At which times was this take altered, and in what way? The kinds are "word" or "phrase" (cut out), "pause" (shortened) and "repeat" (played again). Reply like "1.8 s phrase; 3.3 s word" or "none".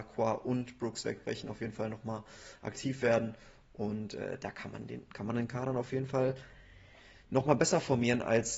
none